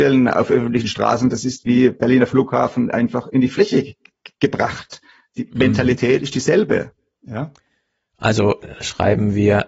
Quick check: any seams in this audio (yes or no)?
no